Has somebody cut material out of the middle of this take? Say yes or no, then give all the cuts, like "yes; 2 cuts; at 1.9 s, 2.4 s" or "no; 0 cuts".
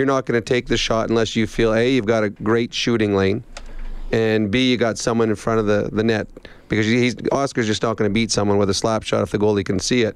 no; 0 cuts